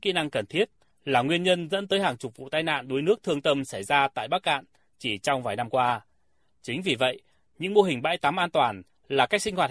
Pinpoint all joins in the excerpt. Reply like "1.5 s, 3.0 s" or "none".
none